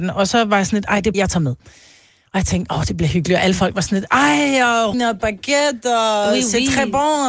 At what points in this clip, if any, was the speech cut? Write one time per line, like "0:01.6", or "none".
0:01.1
0:04.9